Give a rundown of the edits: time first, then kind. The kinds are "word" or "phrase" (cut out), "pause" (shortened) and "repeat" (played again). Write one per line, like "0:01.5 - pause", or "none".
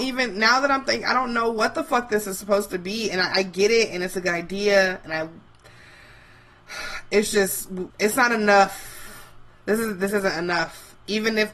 0:07.9 - pause